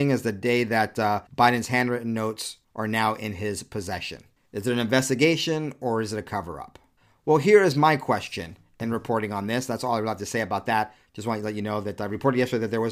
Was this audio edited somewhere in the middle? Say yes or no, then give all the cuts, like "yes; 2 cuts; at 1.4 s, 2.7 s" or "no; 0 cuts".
yes; 4 cuts; at 1.3 s, 2.6 s, 4.4 s, 7.0 s